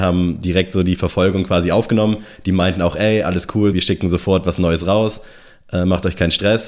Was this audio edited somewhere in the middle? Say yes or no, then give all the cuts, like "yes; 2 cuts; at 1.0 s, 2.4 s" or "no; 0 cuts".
yes; 1 cut; at 3.7 s